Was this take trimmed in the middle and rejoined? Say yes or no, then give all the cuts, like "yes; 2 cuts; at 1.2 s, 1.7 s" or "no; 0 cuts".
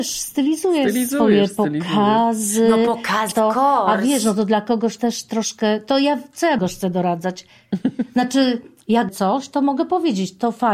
yes; 4 cuts; at 3.3 s, 5.0 s, 6.6 s, 9.1 s